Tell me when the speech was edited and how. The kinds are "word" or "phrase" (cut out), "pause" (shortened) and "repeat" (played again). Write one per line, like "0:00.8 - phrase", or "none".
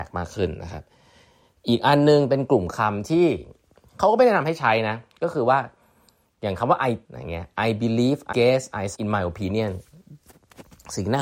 0:07.0 - word
0:08.3 - word
0:08.9 - word